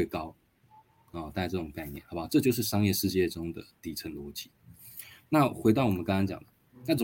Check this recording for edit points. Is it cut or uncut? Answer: uncut